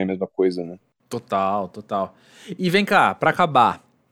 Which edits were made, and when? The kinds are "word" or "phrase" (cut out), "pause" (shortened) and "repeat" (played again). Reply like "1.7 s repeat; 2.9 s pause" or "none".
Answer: none